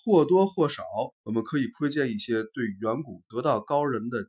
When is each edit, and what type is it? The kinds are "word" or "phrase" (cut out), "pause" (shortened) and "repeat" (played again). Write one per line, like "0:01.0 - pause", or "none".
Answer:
0:01.1 - pause

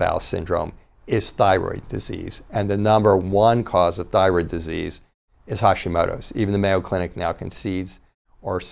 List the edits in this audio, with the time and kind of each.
none

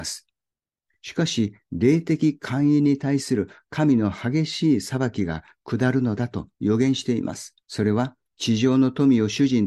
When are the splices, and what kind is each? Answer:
0:07.6 - pause

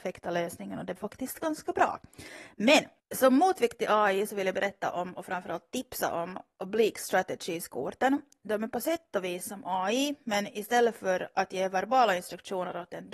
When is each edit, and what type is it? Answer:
0:01.0 - word

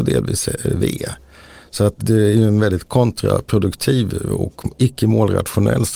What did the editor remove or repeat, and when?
0:02.0 - word

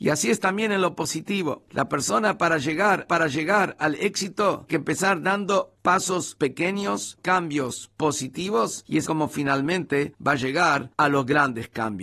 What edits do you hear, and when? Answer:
0:03.1 - repeat
0:04.7 - word
0:05.8 - word
0:07.2 - word
0:09.0 - word

